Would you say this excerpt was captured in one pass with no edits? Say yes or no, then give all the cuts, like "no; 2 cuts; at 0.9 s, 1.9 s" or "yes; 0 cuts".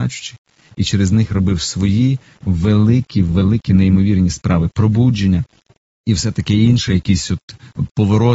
yes; 0 cuts